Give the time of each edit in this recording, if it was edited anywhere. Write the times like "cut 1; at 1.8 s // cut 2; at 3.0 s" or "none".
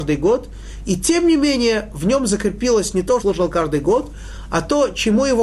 cut 1; at 3.2 s

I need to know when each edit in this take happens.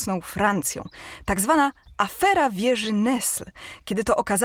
none

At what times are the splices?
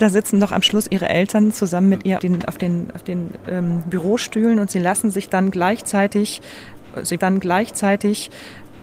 cut 1; at 2.2 s // cut 2; at 7.2 s

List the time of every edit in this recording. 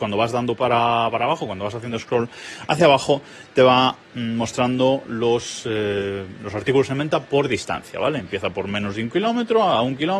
none

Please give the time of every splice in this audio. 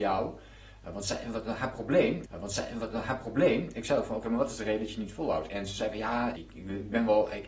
cut 1; at 2.3 s // cut 2; at 6.4 s

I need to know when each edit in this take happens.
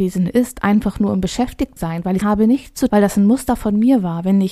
cut 1; at 1.8 s // cut 2; at 2.2 s // cut 3; at 2.9 s

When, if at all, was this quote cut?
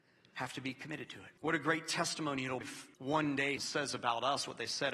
cut 1; at 1.4 s // cut 2; at 2.6 s // cut 3; at 2.9 s // cut 4; at 3.6 s

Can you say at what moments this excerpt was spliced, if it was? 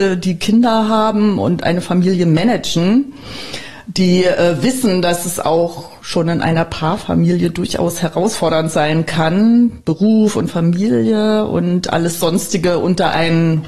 none

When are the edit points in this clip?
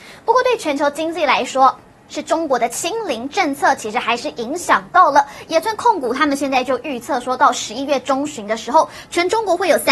cut 1; at 1.9 s

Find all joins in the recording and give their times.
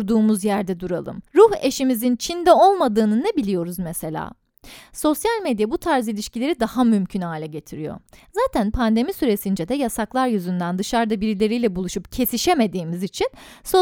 none

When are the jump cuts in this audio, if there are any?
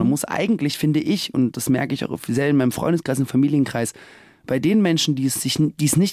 none

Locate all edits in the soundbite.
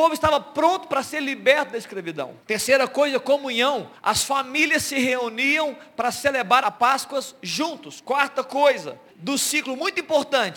cut 1; at 2.4 s // cut 2; at 3.9 s // cut 3; at 6.6 s // cut 4; at 9.1 s

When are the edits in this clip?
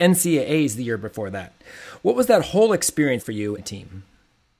cut 1; at 3.2 s // cut 2; at 3.6 s

